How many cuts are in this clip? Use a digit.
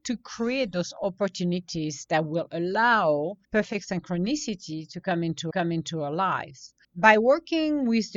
3